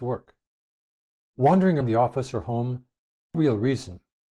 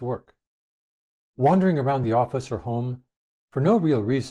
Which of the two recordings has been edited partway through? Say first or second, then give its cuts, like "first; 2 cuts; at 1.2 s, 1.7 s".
first; 2 cuts; at 1.8 s, 3.3 s